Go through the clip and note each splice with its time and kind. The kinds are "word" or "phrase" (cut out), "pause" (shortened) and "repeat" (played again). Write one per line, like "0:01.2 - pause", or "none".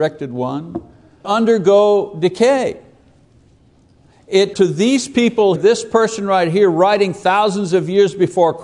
0:01.2 - word
0:04.5 - word
0:05.6 - word